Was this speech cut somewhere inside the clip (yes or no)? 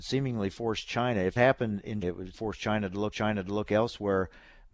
yes